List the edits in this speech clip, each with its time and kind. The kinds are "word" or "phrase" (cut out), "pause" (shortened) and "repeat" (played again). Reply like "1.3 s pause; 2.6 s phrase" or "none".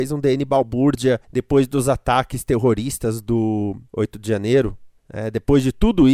1.2 s pause; 3.9 s pause; 5.0 s pause